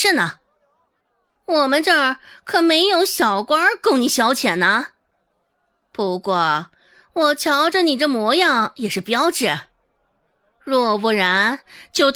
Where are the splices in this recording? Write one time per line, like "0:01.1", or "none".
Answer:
none